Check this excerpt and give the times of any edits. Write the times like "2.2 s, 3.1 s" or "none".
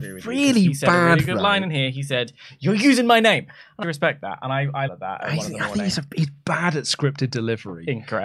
3.8 s, 4.9 s